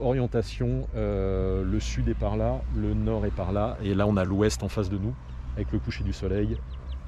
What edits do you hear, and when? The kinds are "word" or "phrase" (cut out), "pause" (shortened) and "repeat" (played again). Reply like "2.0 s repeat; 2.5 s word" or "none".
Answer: none